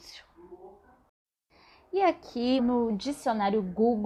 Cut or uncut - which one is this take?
cut